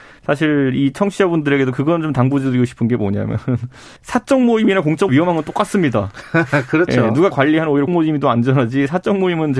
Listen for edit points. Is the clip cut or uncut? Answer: cut